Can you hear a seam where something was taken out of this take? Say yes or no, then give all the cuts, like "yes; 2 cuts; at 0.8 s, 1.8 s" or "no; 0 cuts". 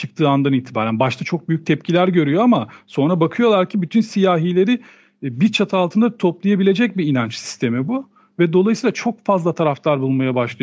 no; 0 cuts